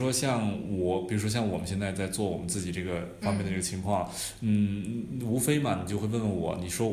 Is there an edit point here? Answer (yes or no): no